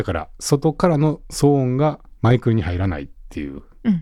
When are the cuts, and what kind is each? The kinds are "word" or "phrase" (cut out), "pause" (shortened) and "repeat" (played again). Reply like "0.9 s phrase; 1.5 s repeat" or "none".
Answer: 2.2 s pause